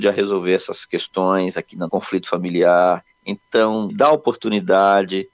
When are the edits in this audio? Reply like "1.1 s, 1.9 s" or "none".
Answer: 1.9 s, 3.9 s